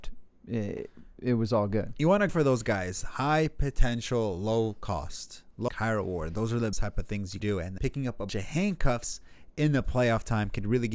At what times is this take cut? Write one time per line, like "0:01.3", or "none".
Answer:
0:02.3
0:05.7
0:06.7
0:07.4
0:07.8
0:08.3